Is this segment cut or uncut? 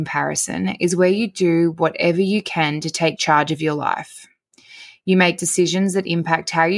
uncut